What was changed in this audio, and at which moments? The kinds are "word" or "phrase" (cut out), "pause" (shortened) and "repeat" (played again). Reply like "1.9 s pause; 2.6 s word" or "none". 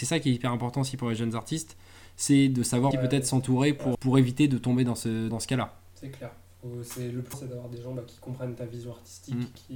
2.9 s word; 3.9 s word; 5.3 s word; 7.3 s word

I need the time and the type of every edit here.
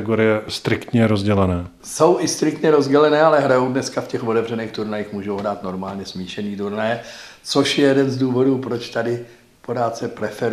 none

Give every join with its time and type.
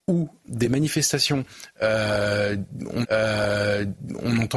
3.0 s repeat

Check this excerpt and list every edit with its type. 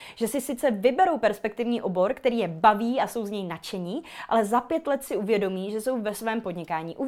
none

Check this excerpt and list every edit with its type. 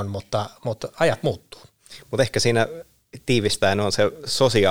none

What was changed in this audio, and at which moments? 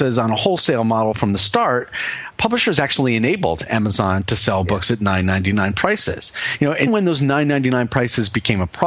2.3 s word; 6.9 s word

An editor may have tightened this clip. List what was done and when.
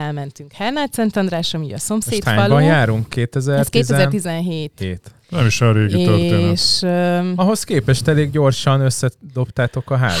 none

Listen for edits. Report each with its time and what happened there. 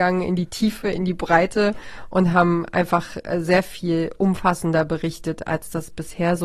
none

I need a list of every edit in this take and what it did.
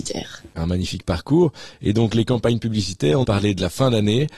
3.2 s phrase

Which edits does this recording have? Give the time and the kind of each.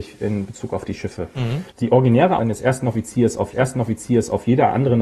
1.7 s pause; 2.4 s word; 3.5 s repeat

